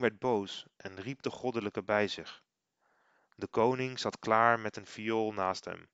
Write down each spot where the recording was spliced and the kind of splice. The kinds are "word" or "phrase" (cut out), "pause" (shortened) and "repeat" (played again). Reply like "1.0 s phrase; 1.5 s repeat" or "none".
none